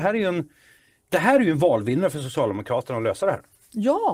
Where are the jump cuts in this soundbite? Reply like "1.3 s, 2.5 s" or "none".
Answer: none